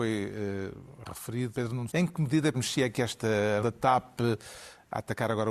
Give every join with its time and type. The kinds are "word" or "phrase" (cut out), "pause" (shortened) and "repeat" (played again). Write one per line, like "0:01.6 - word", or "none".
0:01.5 - word
0:01.9 - word
0:02.5 - word
0:03.6 - word